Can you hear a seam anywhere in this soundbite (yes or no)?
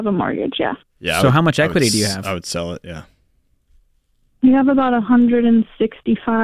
no